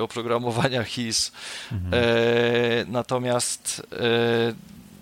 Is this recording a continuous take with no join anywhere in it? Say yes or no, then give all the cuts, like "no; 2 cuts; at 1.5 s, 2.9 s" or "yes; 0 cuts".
yes; 0 cuts